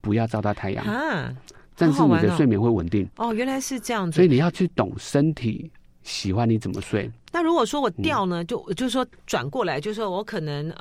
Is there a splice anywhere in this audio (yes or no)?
no